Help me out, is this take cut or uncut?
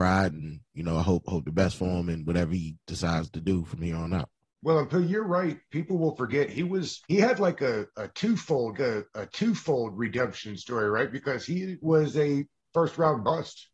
cut